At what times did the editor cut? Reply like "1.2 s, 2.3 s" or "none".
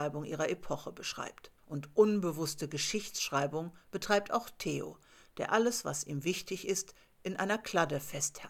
1.6 s